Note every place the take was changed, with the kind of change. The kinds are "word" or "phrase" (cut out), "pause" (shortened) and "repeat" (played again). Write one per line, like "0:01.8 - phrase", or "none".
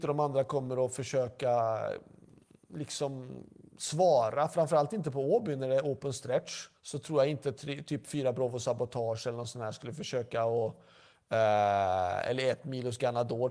0:06.8 - pause